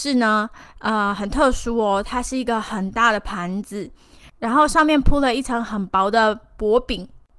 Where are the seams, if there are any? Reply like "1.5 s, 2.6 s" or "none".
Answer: none